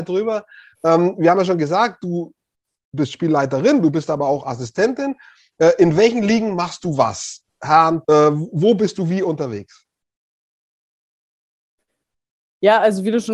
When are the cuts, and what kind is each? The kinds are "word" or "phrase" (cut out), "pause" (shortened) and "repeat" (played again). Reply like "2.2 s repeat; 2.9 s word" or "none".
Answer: 8.0 s word